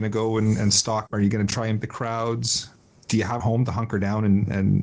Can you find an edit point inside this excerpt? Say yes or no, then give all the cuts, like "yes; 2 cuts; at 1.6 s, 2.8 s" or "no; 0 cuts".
yes; 3 cuts; at 1.1 s, 1.8 s, 3.4 s